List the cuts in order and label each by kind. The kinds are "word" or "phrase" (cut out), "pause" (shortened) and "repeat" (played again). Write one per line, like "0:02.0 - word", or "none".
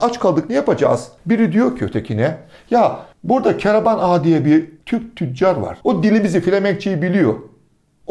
0:01.2 - pause
0:03.1 - pause
0:04.8 - pause
0:05.8 - pause